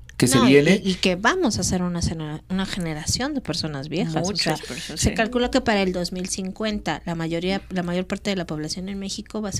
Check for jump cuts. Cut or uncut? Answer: uncut